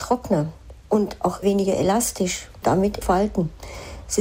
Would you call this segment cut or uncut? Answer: cut